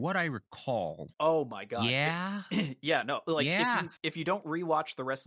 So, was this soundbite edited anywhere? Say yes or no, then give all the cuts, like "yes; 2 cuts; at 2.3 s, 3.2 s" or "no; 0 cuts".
yes; 2 cuts; at 1.1 s, 4.0 s